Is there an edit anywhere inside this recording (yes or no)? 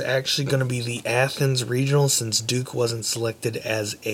no